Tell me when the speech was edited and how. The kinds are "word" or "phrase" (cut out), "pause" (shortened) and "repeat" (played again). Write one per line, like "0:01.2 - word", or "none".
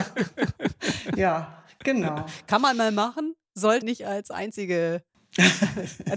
0:03.8 - word